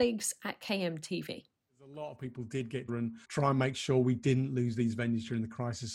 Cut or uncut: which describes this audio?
cut